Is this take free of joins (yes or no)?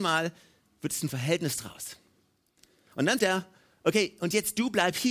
no